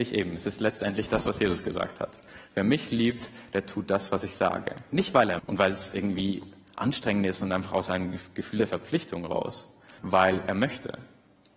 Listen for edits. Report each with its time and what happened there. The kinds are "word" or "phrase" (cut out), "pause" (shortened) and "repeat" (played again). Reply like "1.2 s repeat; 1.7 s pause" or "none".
5.4 s word; 10.0 s word